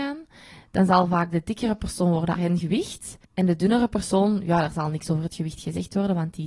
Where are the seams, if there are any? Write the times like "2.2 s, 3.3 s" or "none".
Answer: 2.4 s, 3.2 s

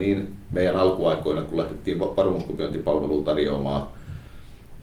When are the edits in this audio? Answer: none

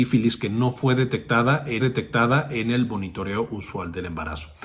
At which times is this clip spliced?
1.8 s

